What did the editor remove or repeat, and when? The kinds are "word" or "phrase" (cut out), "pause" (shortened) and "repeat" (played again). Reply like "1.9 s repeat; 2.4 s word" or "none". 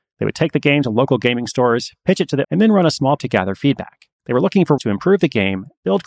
2.4 s word; 3.2 s word; 4.2 s pause; 4.8 s word